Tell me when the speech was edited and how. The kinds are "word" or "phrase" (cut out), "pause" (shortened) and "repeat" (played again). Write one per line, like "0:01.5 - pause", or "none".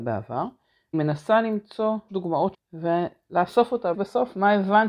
0:00.9 - word
0:02.1 - word
0:02.5 - word
0:03.9 - word